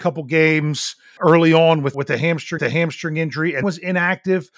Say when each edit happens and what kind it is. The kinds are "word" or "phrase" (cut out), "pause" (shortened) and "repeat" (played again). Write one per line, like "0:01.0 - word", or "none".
0:01.2 - word
0:01.9 - word
0:02.6 - repeat
0:03.6 - word